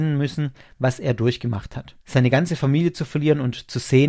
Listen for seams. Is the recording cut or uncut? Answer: cut